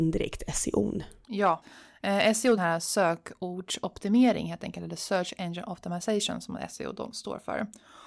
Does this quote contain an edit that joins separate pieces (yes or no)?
yes